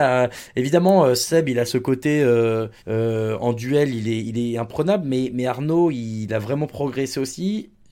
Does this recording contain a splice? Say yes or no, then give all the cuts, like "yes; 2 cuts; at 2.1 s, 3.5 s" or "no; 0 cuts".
yes; 2 cuts; at 1.7 s, 2.8 s